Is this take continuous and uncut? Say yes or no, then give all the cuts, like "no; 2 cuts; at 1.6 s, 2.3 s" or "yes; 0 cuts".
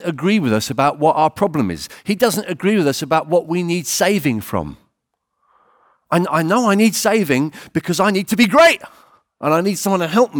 yes; 0 cuts